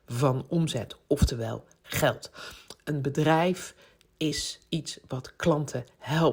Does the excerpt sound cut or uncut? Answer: uncut